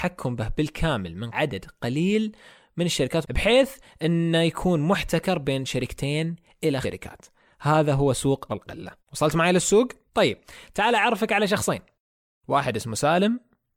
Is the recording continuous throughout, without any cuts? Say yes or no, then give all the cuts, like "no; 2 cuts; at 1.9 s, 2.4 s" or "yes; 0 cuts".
no; 6 cuts; at 1.3 s, 3.2 s, 6.8 s, 8.5 s, 9.0 s, 10.1 s